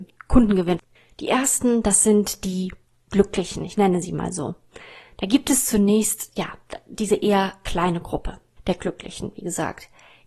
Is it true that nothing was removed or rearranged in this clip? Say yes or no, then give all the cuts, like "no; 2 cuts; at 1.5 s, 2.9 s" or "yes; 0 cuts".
yes; 0 cuts